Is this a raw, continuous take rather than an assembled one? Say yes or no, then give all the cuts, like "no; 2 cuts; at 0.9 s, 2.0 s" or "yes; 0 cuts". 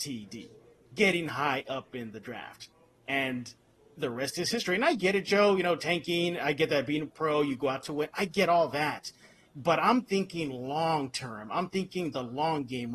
yes; 0 cuts